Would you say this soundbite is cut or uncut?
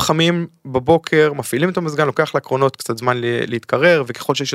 uncut